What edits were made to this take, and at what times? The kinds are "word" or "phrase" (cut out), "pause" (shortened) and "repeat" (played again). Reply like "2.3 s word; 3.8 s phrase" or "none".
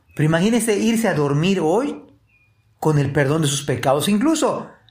none